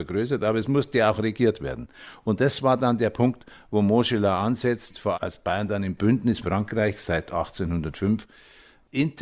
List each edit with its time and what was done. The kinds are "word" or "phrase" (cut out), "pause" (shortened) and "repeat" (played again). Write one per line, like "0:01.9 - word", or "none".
0:05.1 - word
0:06.4 - word